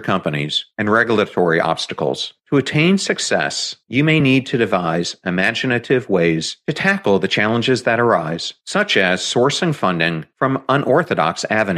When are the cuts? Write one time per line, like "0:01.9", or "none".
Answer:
none